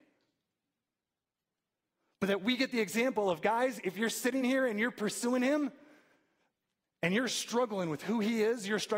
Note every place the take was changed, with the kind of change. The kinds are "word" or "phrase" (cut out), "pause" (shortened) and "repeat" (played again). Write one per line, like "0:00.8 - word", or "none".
none